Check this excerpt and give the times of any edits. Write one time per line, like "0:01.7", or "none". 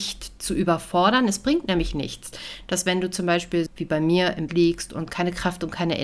0:03.7
0:04.5